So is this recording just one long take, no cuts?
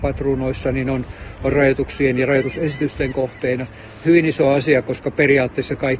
yes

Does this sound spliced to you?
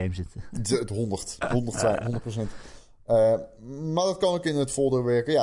no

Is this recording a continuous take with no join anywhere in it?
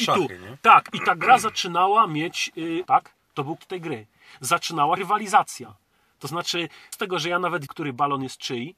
no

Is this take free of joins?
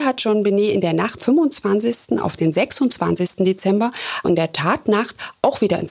no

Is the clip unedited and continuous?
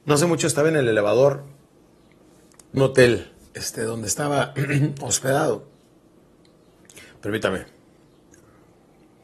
no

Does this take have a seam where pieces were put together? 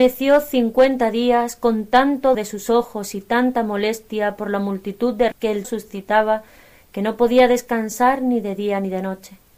yes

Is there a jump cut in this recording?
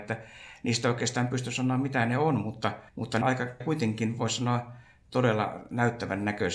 yes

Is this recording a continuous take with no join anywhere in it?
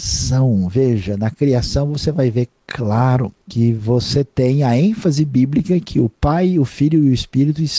no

